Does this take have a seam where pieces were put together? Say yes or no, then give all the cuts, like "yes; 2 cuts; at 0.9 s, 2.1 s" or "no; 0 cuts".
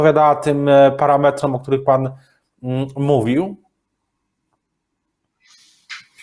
no; 0 cuts